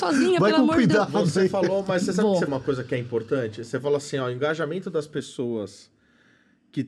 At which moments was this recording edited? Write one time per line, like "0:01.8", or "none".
0:02.5